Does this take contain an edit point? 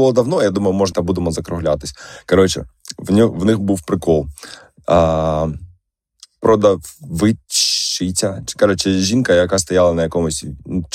yes; 1 cut; at 0.9 s

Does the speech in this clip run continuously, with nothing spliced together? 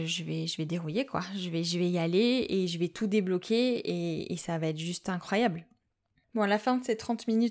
yes; 0 cuts

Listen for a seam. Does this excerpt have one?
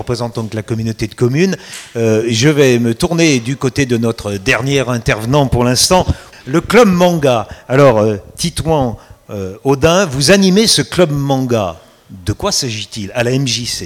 no; 0 cuts

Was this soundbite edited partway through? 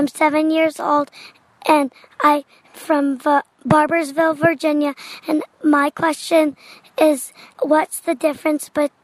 no; 0 cuts

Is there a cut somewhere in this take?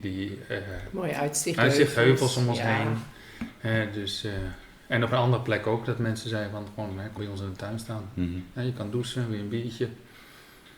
yes; 2 cuts; at 1.6 s, 7.2 s

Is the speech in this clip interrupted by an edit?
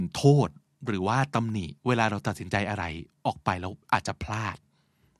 yes; 2 cuts; at 1.8 s, 3.8 s

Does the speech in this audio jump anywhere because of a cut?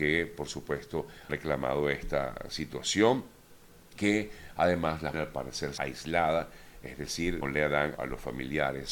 yes; 6 cuts; at 1.3 s, 4.0 s, 5.1 s, 5.8 s, 7.4 s, 8.0 s

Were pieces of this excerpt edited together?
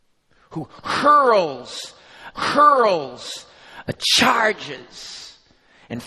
yes; 1 cut; at 2.3 s

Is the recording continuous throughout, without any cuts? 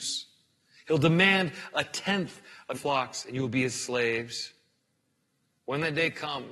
no; 1 cut; at 2.7 s

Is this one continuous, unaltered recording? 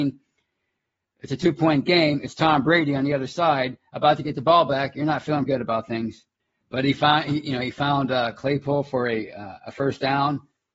no; 2 cuts; at 5.5 s, 6.4 s

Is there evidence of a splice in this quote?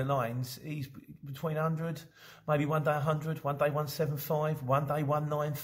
no; 0 cuts

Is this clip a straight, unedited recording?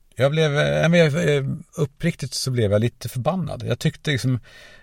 no; 1 cut; at 1.7 s

